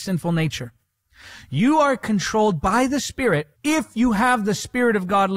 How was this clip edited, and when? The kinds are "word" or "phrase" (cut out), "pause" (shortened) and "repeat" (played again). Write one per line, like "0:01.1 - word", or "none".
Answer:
0:03.5 - pause